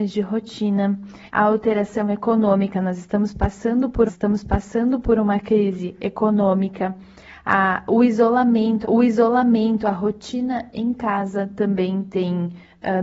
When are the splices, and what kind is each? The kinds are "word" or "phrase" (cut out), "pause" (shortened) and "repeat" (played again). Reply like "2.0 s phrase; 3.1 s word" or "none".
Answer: 1.3 s pause; 4.1 s repeat; 8.8 s repeat